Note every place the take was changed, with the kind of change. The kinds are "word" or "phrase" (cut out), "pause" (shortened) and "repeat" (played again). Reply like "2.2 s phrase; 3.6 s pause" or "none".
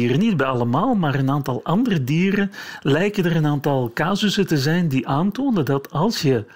none